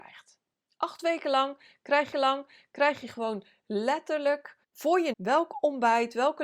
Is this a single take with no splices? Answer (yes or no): no